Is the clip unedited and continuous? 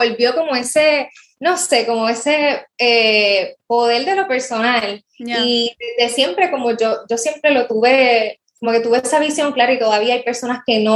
yes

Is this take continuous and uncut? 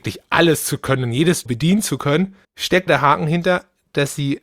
no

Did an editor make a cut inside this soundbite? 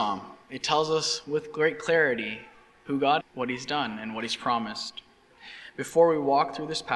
yes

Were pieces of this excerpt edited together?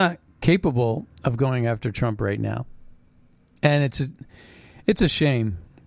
no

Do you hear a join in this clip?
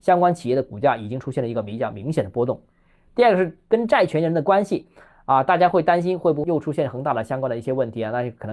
no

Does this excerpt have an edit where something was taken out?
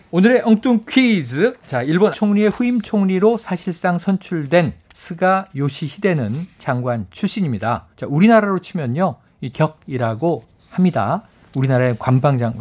yes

